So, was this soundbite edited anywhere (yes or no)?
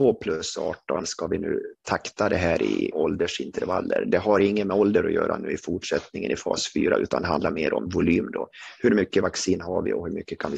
yes